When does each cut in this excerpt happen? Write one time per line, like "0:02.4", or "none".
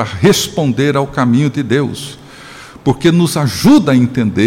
none